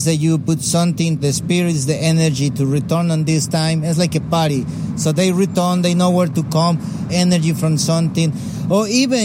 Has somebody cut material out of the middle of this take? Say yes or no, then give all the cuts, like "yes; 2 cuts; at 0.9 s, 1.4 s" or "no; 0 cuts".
yes; 2 cuts; at 1.2 s, 7.1 s